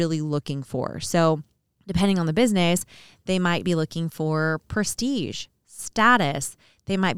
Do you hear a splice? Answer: no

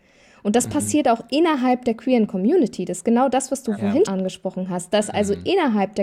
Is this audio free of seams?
no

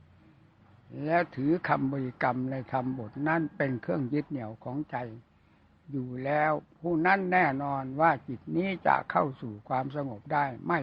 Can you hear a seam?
no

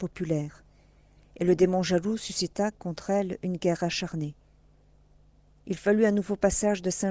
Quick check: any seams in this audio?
no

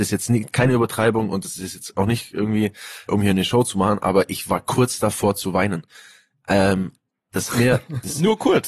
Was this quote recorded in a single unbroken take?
no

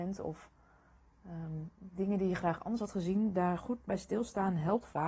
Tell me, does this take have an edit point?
no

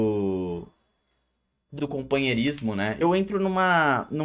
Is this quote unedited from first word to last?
no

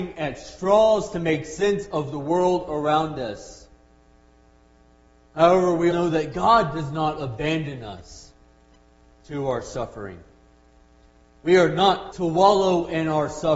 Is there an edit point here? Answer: yes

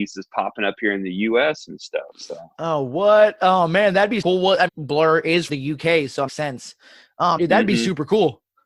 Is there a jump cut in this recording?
yes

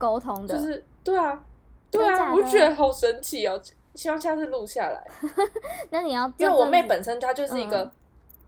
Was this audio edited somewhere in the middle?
no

